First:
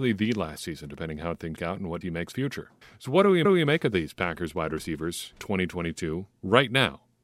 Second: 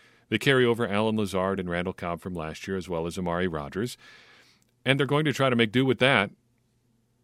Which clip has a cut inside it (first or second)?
first